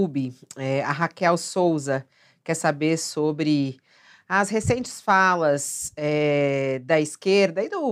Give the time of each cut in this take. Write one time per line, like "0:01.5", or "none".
none

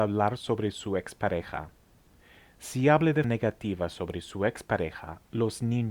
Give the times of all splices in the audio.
0:03.2

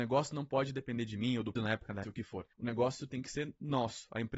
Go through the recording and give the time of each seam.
0:01.6
0:02.0
0:02.5

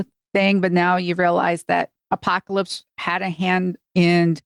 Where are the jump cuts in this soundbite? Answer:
0:02.0

